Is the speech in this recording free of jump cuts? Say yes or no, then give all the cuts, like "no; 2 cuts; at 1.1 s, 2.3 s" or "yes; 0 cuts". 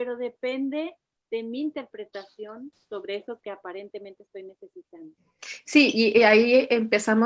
yes; 0 cuts